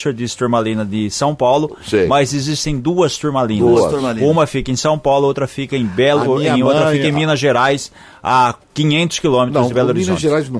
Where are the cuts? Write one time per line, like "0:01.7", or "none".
0:08.6